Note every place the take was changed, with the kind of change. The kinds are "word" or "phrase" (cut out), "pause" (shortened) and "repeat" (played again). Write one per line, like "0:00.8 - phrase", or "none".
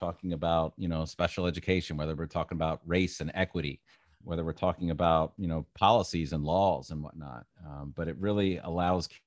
0:04.2 - word